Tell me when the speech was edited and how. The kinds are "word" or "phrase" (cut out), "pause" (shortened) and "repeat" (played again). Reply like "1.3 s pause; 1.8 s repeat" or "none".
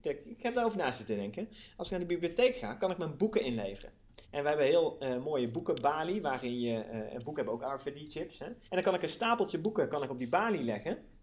4.2 s pause; 8.6 s pause